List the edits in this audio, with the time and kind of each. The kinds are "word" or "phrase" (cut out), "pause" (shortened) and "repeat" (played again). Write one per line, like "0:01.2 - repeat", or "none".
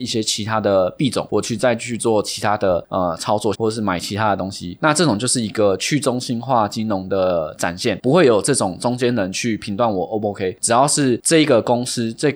0:03.5 - phrase